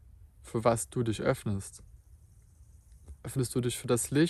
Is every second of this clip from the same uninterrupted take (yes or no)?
no